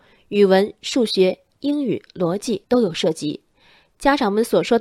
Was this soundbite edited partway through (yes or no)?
yes